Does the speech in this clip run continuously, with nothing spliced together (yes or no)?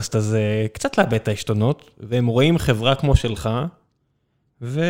yes